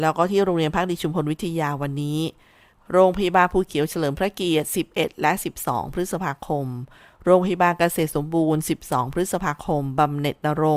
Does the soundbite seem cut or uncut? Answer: uncut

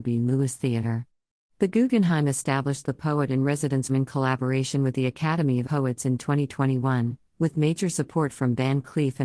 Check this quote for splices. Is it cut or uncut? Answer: cut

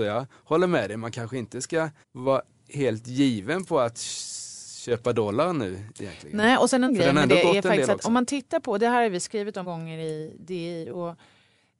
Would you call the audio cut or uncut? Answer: cut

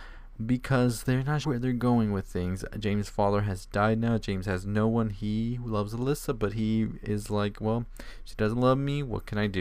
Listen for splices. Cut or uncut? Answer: cut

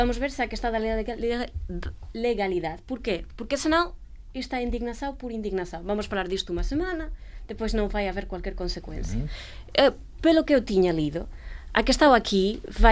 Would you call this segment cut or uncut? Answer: uncut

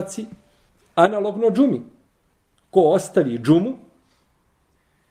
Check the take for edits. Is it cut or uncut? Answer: uncut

